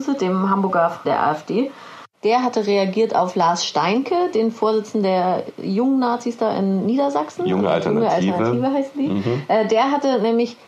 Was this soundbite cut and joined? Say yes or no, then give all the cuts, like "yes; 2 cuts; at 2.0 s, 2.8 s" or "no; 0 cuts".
yes; 2 cuts; at 1.0 s, 2.1 s